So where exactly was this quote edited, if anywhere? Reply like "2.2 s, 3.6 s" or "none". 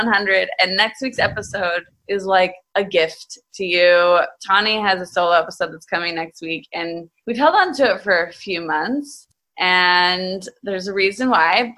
none